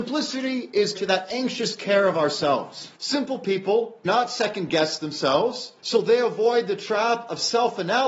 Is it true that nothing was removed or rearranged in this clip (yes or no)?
no